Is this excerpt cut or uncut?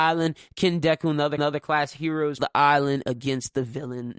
cut